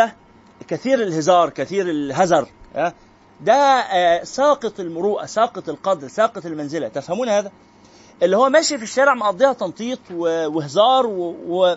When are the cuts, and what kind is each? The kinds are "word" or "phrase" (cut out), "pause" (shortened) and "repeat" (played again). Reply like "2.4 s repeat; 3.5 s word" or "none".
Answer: none